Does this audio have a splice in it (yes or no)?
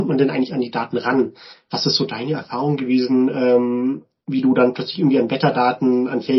no